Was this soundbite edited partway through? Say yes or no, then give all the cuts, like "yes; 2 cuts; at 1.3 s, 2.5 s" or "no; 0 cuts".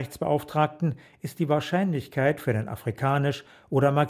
no; 0 cuts